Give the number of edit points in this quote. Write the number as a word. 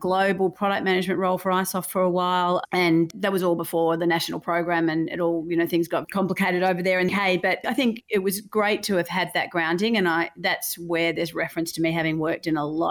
four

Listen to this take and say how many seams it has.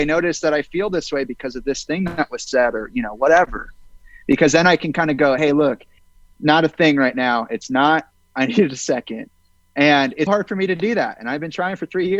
three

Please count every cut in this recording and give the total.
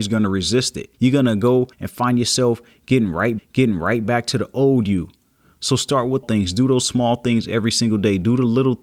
four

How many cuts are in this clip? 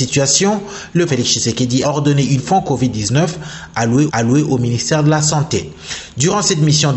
four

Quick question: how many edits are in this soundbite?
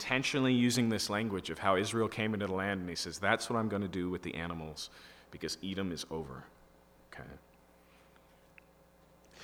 zero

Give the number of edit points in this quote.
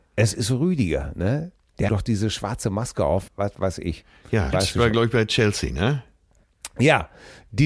three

